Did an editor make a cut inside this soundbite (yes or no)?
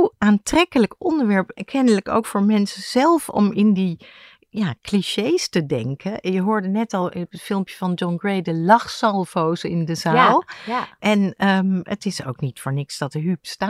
no